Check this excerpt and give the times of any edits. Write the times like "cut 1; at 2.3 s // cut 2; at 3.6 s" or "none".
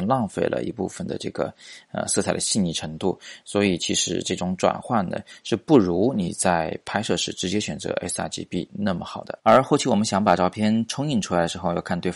cut 1; at 9.4 s

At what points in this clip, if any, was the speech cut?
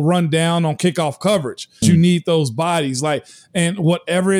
cut 1; at 1.8 s

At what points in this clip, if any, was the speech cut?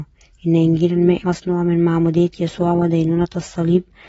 cut 1; at 1.2 s

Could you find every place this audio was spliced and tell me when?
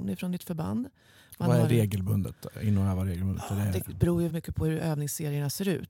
cut 1; at 4.3 s

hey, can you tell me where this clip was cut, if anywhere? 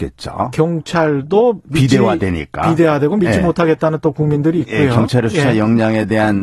none

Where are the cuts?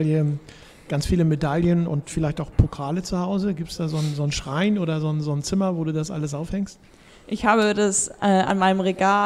none

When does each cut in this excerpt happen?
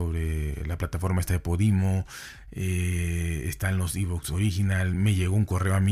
none

